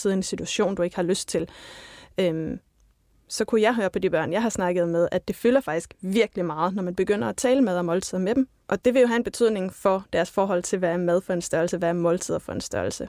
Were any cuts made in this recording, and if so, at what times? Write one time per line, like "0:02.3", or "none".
none